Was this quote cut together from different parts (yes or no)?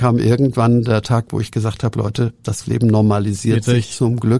no